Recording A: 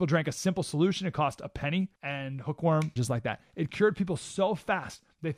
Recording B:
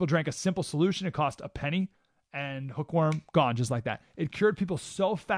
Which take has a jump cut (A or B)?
A